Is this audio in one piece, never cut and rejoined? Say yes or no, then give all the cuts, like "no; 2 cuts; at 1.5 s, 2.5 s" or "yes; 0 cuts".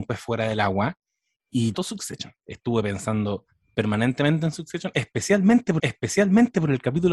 no; 2 cuts; at 1.7 s, 5.8 s